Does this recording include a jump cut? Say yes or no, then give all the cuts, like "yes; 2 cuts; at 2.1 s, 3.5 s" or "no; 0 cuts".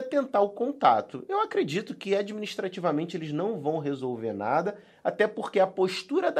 no; 0 cuts